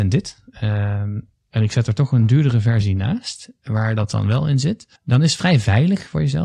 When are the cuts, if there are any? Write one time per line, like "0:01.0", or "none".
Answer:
0:05.0